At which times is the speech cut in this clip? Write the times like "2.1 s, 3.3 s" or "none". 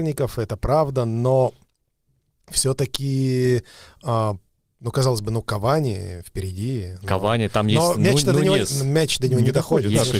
none